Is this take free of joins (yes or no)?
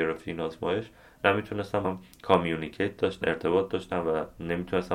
no